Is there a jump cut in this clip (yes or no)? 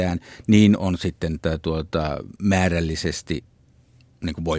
yes